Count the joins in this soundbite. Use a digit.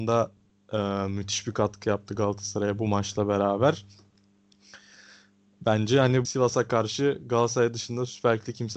1